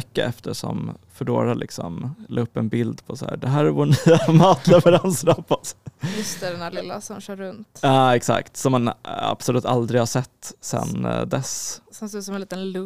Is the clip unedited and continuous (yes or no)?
yes